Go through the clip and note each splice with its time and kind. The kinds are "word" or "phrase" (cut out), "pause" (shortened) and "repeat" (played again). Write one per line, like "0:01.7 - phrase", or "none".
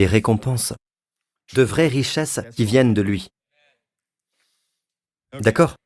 none